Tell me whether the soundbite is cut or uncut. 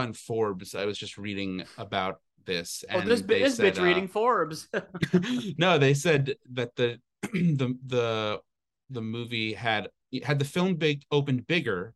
uncut